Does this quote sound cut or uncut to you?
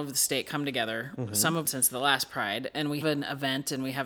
cut